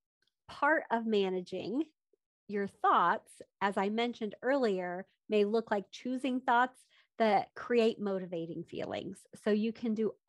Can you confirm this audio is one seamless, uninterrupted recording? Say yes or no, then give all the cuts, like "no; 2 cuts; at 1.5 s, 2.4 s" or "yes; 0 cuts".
yes; 0 cuts